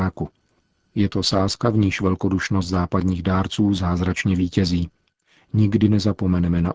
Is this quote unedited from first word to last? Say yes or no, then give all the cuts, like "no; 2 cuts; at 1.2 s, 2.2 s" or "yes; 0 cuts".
yes; 0 cuts